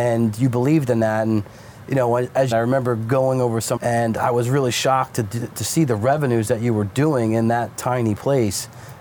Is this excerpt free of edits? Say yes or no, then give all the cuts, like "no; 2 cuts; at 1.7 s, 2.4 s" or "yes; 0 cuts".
no; 2 cuts; at 2.5 s, 3.8 s